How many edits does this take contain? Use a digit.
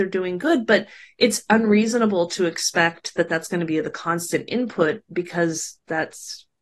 0